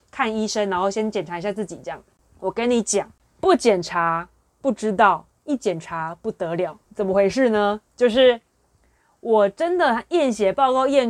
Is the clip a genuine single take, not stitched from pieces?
no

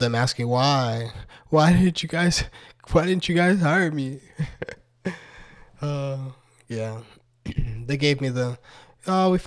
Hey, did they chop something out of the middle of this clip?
no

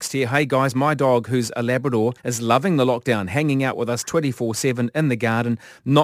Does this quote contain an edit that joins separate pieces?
yes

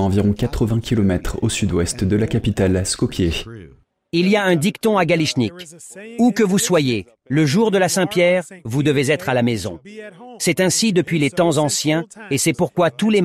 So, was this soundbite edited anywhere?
no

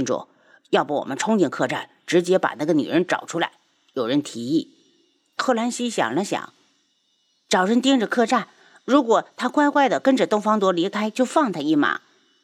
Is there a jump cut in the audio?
no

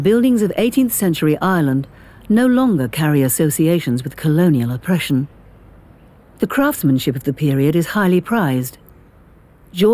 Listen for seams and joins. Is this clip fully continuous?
yes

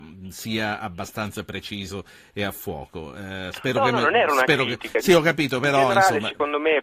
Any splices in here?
no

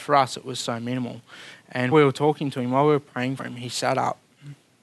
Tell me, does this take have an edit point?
yes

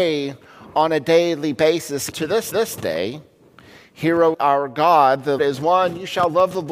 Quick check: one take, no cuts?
no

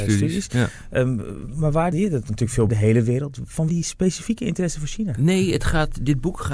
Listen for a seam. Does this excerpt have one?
yes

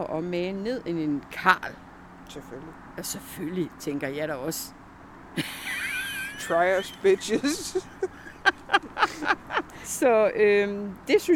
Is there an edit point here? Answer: no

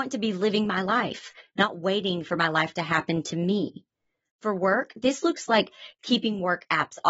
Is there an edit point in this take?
no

